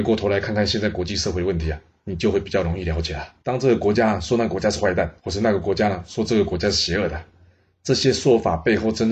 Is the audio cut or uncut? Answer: cut